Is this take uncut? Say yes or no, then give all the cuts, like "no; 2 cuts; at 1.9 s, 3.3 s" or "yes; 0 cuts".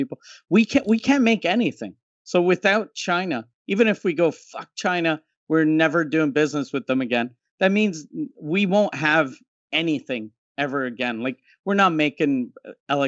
yes; 0 cuts